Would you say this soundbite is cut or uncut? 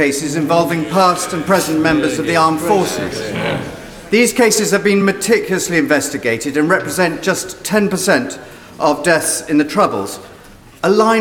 uncut